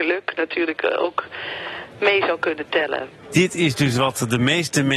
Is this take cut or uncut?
cut